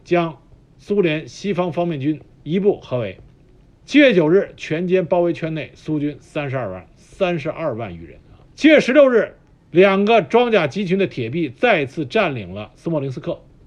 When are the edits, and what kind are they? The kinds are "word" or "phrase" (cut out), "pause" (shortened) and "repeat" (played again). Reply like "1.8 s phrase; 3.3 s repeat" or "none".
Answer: 2.3 s pause; 6.9 s pause; 8.5 s pause; 9.6 s pause